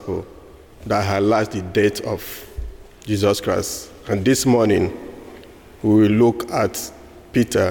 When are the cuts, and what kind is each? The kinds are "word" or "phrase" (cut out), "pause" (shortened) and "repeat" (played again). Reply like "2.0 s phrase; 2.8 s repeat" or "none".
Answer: none